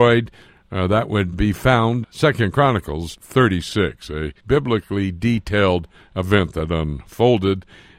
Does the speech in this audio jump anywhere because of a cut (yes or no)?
yes